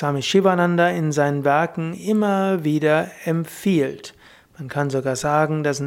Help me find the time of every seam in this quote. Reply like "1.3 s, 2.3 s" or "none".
none